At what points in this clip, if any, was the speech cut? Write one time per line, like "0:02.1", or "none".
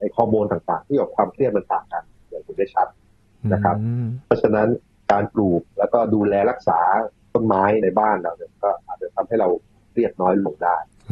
none

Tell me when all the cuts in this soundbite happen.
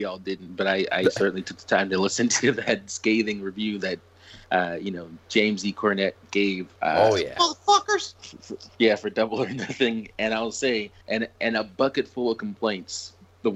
0:04.4
0:06.8
0:11.0

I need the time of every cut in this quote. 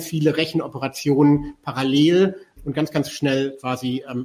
0:02.6

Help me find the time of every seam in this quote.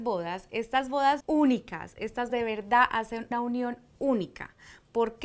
0:01.2
0:02.3
0:03.3

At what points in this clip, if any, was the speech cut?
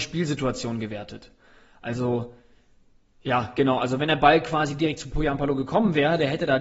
none

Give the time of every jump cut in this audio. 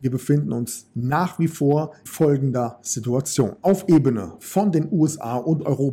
0:02.1
0:03.6

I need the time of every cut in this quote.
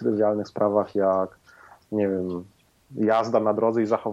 none

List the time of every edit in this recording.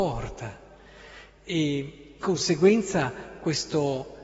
0:02.2

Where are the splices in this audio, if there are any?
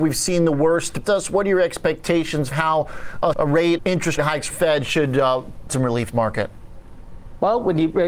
0:01.0
0:02.5
0:03.3
0:03.8
0:04.2
0:04.5
0:05.7
0:06.1

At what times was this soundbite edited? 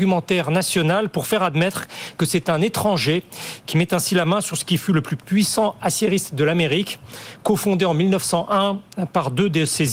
none

